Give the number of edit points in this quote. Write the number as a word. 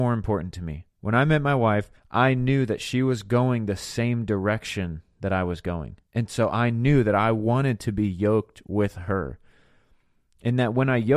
three